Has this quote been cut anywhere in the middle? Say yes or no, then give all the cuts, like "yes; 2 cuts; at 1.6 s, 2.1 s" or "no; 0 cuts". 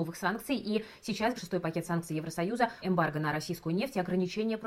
yes; 2 cuts; at 1.4 s, 2.8 s